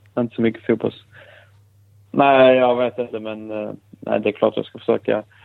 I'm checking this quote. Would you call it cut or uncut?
uncut